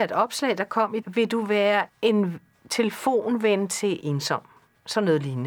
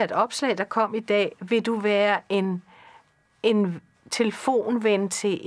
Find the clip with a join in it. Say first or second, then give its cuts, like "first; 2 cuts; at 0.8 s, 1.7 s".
first; 3 cuts; at 1.0 s, 1.9 s, 4.0 s